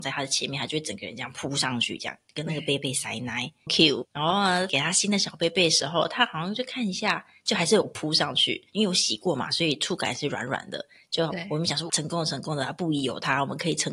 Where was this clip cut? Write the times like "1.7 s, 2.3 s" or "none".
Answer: 3.7 s, 4.0 s, 11.9 s